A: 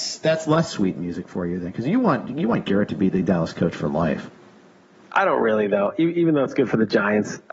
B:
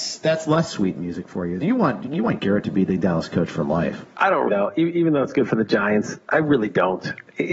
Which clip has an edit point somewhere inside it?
B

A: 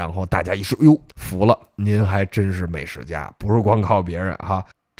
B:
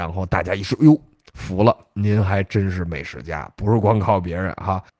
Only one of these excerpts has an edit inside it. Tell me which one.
A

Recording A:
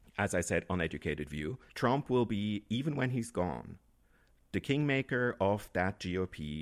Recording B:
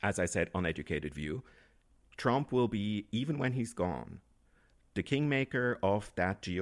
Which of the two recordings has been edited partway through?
A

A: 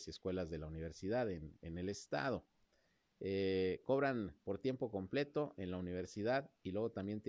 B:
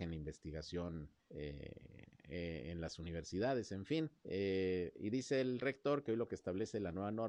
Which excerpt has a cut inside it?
B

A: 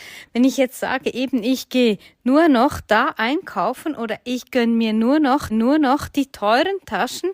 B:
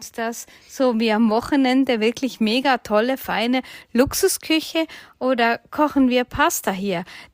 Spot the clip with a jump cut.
A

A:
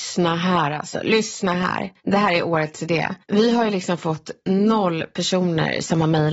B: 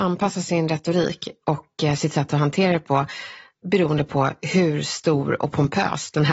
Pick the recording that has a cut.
A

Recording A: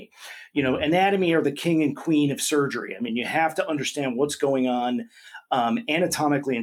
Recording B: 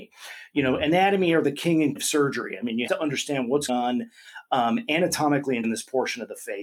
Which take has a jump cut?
B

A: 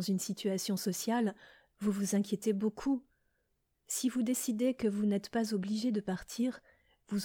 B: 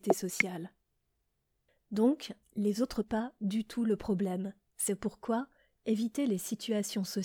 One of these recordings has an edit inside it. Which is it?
B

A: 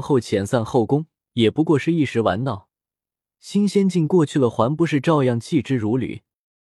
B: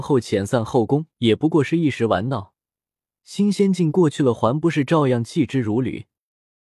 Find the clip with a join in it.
B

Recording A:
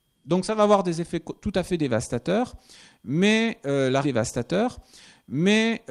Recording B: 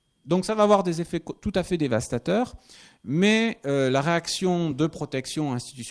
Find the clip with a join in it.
A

